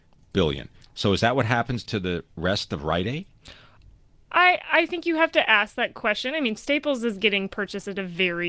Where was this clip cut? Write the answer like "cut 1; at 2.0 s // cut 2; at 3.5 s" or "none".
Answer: cut 1; at 1.9 s // cut 2; at 6.6 s

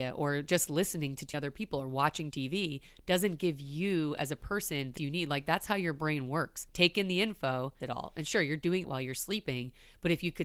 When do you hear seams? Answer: cut 1; at 1.3 s // cut 2; at 2.3 s // cut 3; at 5.0 s // cut 4; at 6.7 s // cut 5; at 7.8 s // cut 6; at 8.8 s

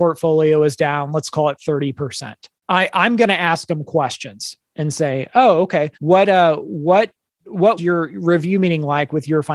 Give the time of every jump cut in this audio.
cut 1; at 2.6 s // cut 2; at 5.9 s // cut 3; at 7.8 s

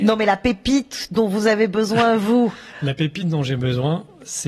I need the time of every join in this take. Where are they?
none

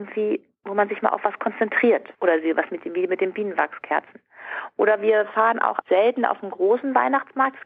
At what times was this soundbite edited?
cut 1; at 2.1 s // cut 2; at 5.8 s

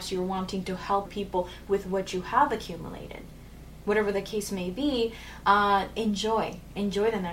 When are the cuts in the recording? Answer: cut 1; at 1.1 s

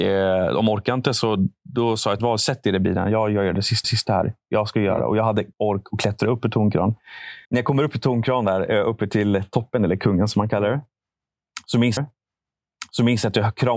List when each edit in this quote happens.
cut 1; at 2.2 s // cut 2; at 3.8 s // cut 3; at 5.5 s // cut 4; at 7.4 s // cut 5; at 12.0 s

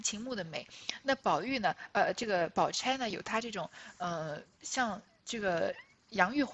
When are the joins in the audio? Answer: none

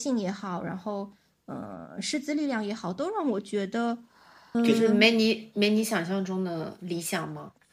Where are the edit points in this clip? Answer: cut 1; at 4.5 s

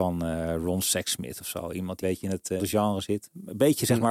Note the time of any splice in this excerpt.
cut 1; at 2.0 s // cut 2; at 2.6 s

